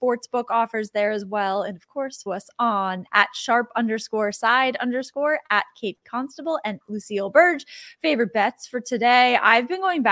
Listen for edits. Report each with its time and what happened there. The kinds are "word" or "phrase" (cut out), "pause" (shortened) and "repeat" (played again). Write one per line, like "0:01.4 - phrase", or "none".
0:02.3 - word
0:03.1 - word
0:06.8 - word